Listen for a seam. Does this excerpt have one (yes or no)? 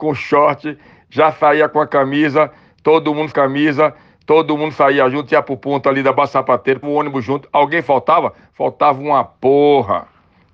yes